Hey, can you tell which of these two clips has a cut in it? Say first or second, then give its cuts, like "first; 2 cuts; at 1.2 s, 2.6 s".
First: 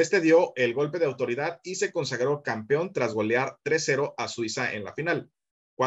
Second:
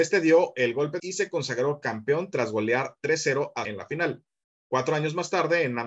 second; 2 cuts; at 1.0 s, 3.6 s